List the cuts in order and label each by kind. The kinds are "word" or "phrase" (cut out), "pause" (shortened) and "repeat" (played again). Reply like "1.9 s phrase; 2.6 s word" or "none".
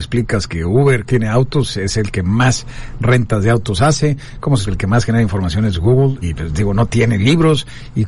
1.1 s word; 4.6 s phrase; 6.2 s word